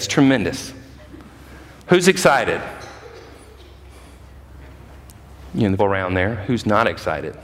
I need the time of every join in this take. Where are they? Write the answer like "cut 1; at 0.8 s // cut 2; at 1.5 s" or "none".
cut 1; at 5.8 s